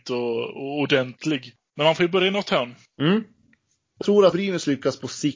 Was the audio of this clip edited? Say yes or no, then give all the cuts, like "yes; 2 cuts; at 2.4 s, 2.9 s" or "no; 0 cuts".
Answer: yes; 4 cuts; at 1.7 s, 2.8 s, 4.0 s, 4.3 s